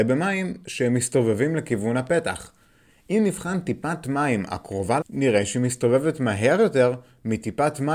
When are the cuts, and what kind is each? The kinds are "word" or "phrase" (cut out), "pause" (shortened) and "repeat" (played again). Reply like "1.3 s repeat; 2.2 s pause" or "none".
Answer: 5.0 s word